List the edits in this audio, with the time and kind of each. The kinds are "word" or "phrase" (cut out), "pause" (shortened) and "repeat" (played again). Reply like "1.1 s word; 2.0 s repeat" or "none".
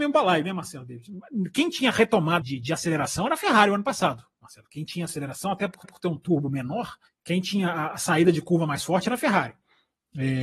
2.4 s word; 5.8 s repeat; 7.1 s pause